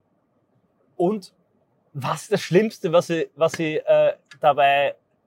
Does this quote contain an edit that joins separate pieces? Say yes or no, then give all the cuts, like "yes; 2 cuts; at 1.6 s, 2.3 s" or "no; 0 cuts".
no; 0 cuts